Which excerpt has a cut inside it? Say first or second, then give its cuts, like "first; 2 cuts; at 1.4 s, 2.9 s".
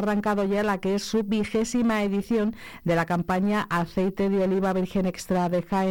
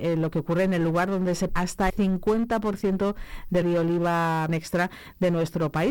second; 4 cuts; at 1.5 s, 1.9 s, 3.6 s, 4.5 s